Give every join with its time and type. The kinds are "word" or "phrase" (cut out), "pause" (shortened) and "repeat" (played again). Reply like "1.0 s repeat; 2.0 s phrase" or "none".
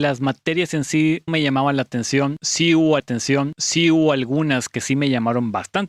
1.3 s word; 3.0 s repeat